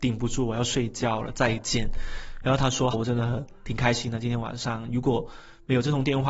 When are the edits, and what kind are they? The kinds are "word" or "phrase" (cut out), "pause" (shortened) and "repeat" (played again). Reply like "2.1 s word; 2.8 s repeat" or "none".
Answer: 2.9 s phrase